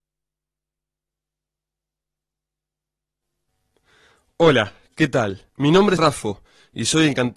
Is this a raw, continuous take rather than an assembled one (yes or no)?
no